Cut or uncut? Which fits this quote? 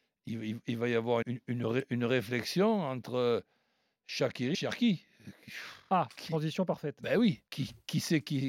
cut